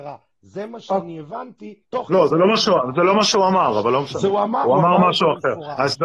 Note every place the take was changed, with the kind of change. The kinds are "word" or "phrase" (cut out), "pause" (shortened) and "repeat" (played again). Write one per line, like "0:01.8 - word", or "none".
0:01.8 - pause